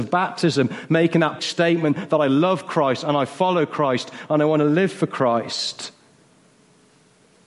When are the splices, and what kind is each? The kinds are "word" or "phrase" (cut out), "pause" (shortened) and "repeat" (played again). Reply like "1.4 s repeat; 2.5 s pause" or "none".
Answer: 1.4 s word